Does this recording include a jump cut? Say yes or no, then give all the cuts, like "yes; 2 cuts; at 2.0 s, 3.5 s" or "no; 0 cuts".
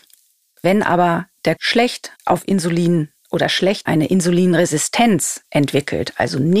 yes; 3 cuts; at 1.6 s, 2.2 s, 3.9 s